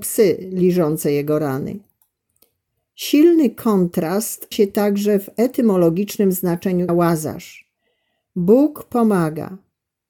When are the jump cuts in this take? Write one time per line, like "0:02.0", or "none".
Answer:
0:04.5
0:06.9